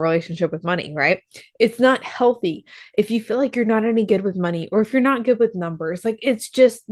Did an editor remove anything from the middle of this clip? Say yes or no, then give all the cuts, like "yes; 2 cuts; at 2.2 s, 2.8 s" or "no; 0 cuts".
no; 0 cuts